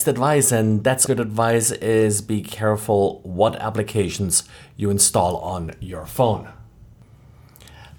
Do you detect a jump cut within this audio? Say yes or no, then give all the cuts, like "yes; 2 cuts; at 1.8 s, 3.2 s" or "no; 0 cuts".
yes; 1 cut; at 1.1 s